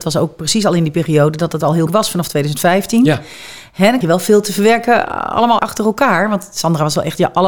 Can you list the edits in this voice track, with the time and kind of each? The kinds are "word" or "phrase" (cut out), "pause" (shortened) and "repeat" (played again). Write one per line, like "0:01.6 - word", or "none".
0:01.9 - word
0:04.0 - word
0:05.6 - word